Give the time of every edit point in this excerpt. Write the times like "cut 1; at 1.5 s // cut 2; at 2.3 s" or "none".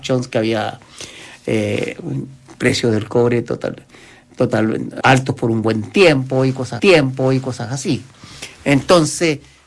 cut 1; at 5.0 s // cut 2; at 6.8 s

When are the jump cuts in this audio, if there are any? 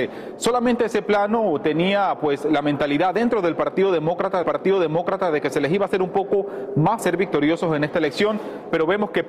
cut 1; at 4.4 s // cut 2; at 7.0 s

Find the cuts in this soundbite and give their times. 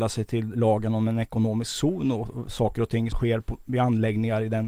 cut 1; at 3.1 s

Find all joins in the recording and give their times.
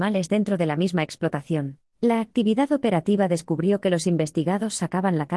cut 1; at 1.9 s

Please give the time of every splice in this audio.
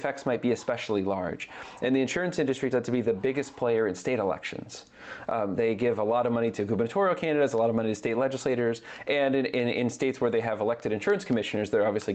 cut 1; at 2.7 s

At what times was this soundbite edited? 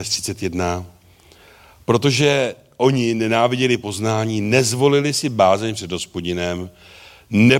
none

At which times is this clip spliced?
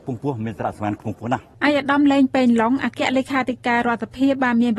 cut 1; at 1.5 s

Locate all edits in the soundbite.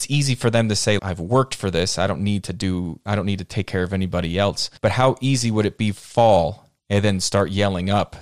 cut 1; at 1.0 s // cut 2; at 4.8 s // cut 3; at 6.0 s // cut 4; at 6.8 s

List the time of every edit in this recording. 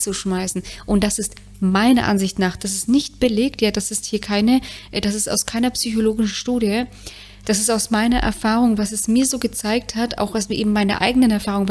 none

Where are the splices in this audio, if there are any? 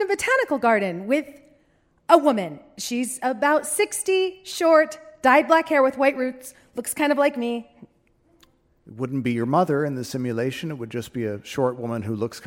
none

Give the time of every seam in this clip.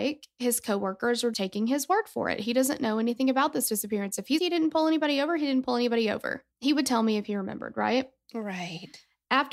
cut 1; at 1.3 s // cut 2; at 4.4 s // cut 3; at 6.5 s

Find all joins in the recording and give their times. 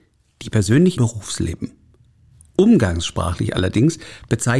cut 1; at 1.0 s

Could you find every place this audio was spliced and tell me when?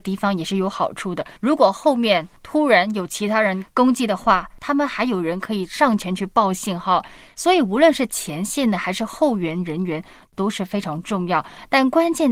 cut 1; at 1.4 s

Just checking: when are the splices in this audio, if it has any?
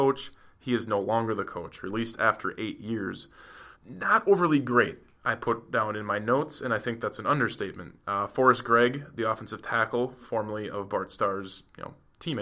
cut 1; at 3.8 s

